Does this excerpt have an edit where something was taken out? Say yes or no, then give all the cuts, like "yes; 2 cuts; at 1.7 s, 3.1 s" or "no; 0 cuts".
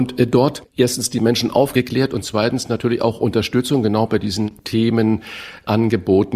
no; 0 cuts